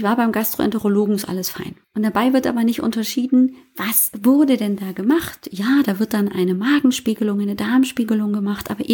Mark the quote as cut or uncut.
cut